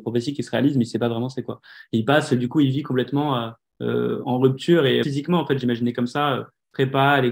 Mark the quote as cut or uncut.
cut